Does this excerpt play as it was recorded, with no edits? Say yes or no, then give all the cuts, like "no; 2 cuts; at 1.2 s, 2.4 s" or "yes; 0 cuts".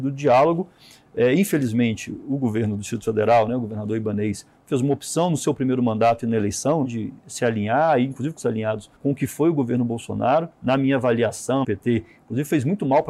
no; 5 cuts; at 6.8 s, 8.4 s, 9.0 s, 10.5 s, 11.6 s